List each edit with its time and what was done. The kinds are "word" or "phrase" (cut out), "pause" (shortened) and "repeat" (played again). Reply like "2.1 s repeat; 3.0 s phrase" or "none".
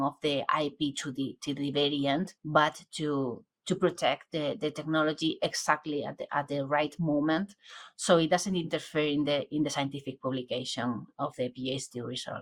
2.4 s pause